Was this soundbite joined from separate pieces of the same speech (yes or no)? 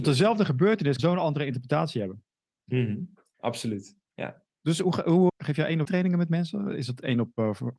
yes